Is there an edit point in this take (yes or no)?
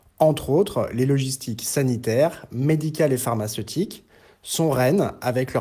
no